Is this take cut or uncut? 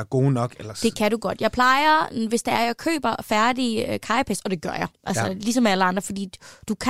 uncut